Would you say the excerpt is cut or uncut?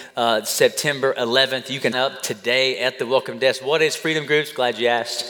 cut